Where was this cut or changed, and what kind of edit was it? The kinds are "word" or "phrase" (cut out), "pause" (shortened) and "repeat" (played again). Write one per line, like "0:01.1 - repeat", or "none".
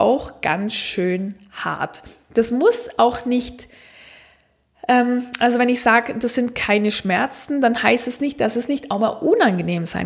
none